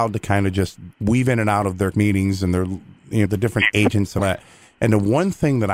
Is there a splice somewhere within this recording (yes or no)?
yes